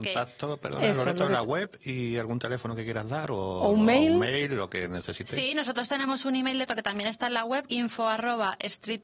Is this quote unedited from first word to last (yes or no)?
no